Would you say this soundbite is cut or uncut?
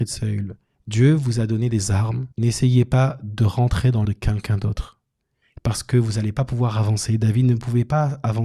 cut